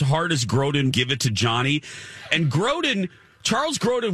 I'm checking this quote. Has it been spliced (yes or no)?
yes